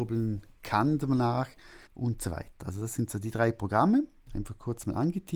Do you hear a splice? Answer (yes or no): yes